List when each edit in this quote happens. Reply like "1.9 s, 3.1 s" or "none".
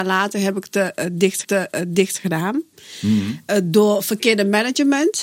1.4 s